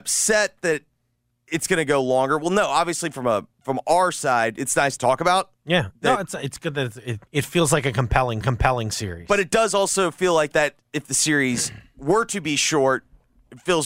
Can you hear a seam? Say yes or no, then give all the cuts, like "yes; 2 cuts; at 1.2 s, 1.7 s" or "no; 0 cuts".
yes; 5 cuts; at 3.5 s, 5.0 s, 7.3 s, 8.4 s, 10.5 s